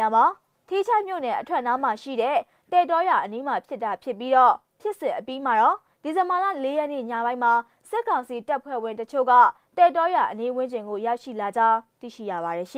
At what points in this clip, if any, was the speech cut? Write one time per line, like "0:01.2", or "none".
none

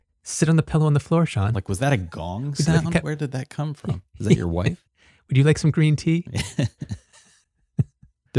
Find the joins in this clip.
0:04.9

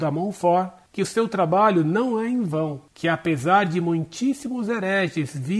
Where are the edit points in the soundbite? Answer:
none

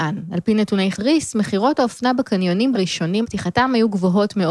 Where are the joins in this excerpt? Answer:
0:00.9
0:02.7
0:03.2

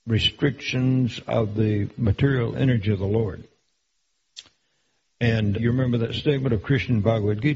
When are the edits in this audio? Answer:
0:05.5

